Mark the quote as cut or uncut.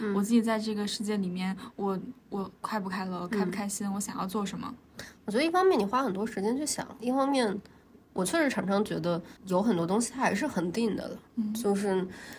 cut